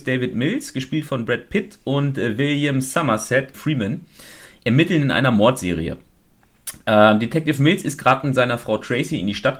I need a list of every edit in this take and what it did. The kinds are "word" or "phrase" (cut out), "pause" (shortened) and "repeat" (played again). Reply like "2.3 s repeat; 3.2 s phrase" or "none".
3.5 s phrase

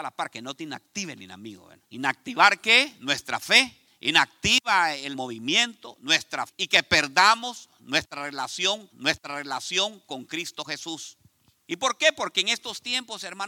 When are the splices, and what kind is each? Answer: 1.8 s pause; 3.9 s pause; 5.1 s word; 6.5 s word; 8.9 s repeat; 11.4 s pause

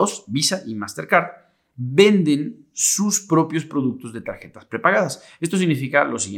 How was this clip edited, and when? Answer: none

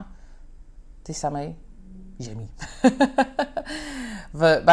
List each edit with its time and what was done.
none

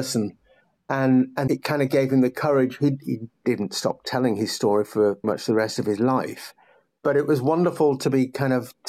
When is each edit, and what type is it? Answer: 1.5 s word; 5.2 s word

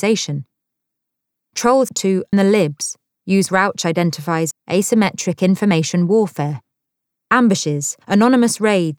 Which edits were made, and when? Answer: 1.9 s word; 2.3 s word; 3.5 s word; 4.5 s word; 8.0 s word

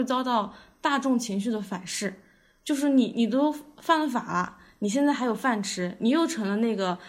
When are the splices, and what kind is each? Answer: none

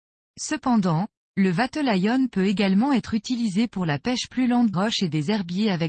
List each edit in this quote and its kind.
4.7 s word

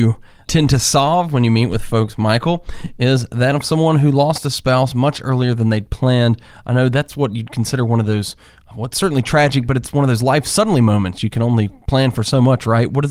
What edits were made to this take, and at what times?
none

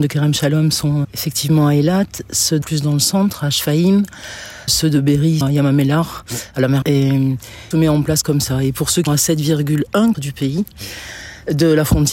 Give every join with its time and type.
1.0 s word; 2.6 s phrase; 4.7 s word; 5.4 s word; 6.8 s word; 7.7 s phrase; 9.1 s word; 10.1 s word

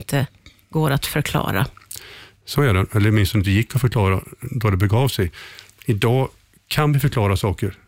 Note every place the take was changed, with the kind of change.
none

